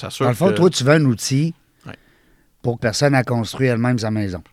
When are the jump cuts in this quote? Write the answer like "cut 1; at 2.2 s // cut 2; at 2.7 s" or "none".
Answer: cut 1; at 2.8 s

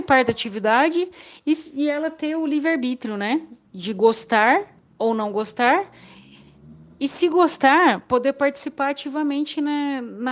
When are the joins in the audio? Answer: none

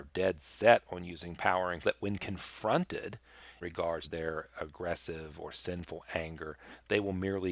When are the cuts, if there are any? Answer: cut 1; at 1.8 s // cut 2; at 3.6 s // cut 3; at 4.0 s

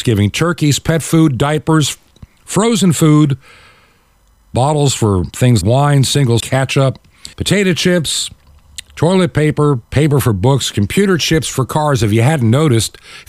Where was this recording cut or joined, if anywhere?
cut 1; at 5.6 s // cut 2; at 6.4 s // cut 3; at 7.3 s // cut 4; at 9.8 s

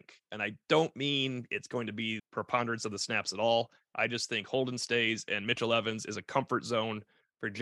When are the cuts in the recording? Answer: cut 1; at 2.2 s

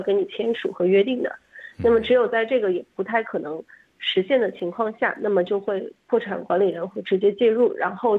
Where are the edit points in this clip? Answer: none

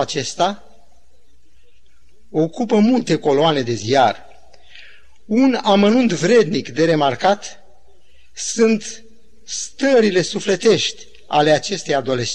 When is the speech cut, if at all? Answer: none

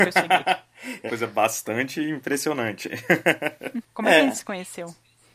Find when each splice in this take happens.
cut 1; at 1.1 s

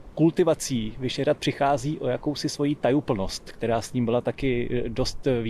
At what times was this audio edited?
none

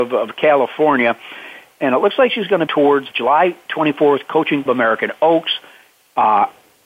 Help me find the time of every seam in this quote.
cut 1; at 2.7 s // cut 2; at 3.1 s // cut 3; at 4.7 s

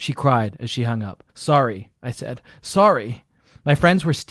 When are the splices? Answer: cut 1; at 1.3 s

